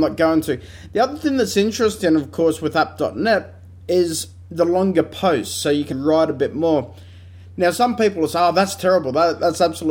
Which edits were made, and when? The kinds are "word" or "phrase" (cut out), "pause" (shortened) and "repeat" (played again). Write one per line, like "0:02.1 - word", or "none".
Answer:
0:05.9 - word